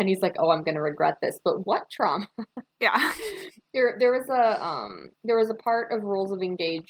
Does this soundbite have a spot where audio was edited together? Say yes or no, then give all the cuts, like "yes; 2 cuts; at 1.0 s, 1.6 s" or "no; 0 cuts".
yes; 2 cuts; at 2.7 s, 5.1 s